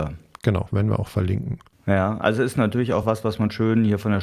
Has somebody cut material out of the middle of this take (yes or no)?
no